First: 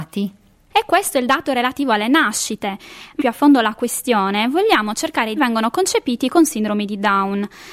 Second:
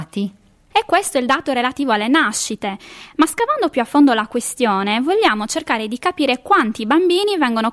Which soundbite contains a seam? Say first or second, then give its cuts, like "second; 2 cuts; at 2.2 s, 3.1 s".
first; 2 cuts; at 3.2 s, 5.4 s